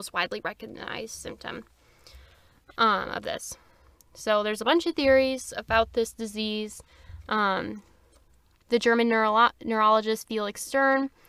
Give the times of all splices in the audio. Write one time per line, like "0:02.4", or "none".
none